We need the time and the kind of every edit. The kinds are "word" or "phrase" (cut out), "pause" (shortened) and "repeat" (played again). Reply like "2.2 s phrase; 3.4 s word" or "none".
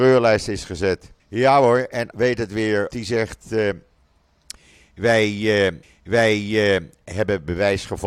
1.2 s pause; 2.1 s word; 2.9 s word; 5.8 s repeat